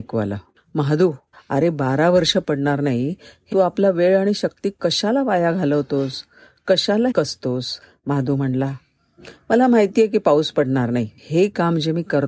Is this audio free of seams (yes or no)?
no